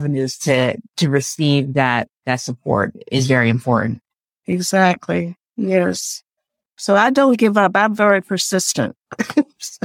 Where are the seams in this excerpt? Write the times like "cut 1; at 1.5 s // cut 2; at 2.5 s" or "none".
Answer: cut 1; at 6.4 s

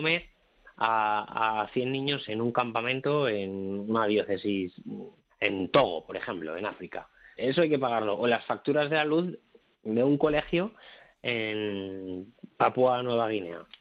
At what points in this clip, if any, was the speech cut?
cut 1; at 2.3 s // cut 2; at 5.3 s // cut 3; at 7.4 s

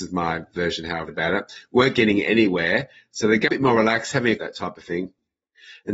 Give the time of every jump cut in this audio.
cut 1; at 1.1 s // cut 2; at 3.5 s // cut 3; at 4.4 s

